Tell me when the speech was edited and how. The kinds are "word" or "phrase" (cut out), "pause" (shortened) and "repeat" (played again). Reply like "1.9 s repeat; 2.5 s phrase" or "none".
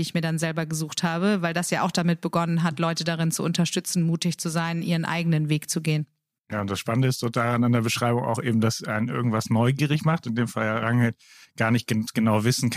none